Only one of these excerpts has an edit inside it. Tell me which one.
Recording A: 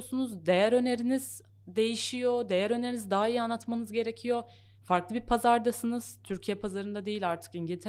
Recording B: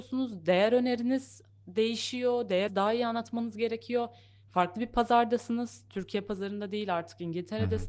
B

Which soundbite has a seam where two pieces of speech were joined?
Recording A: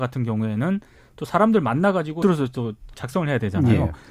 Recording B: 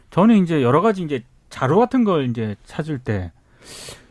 A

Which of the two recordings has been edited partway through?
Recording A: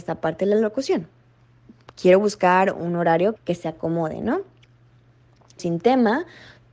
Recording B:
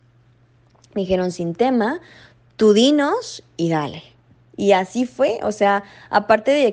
A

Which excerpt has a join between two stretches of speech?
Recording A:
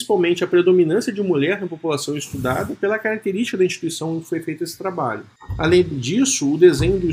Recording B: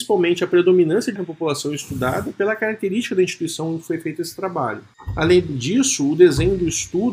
B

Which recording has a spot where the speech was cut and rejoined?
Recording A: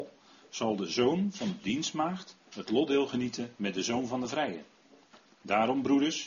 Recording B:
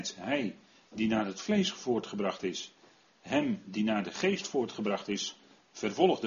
A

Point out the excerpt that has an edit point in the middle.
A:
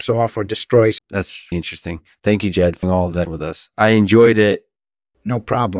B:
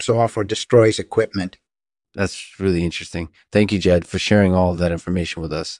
A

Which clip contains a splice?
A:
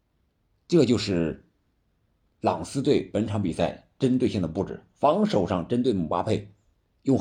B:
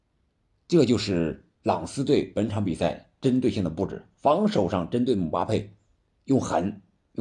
B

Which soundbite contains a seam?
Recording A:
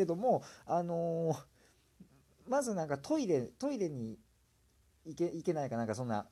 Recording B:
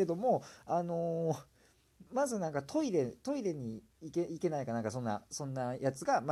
B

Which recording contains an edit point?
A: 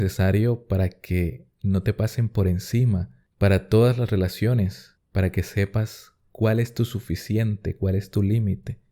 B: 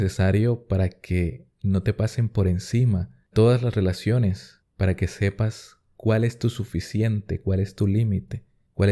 B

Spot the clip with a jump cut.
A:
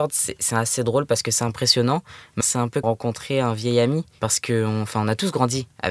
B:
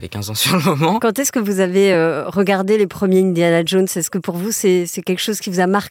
A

